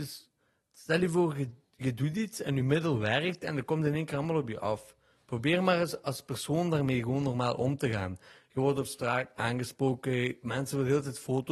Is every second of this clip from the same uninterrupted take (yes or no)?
yes